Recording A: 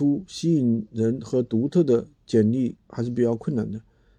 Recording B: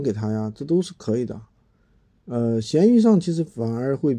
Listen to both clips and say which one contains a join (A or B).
A